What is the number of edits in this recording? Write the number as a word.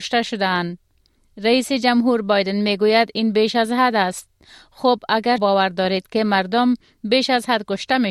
one